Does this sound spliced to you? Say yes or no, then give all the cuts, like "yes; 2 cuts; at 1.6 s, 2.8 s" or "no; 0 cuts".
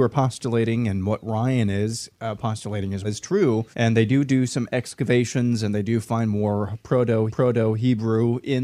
yes; 3 cuts; at 3.0 s, 3.7 s, 7.3 s